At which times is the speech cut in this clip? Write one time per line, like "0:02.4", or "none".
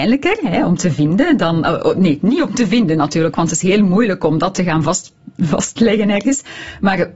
none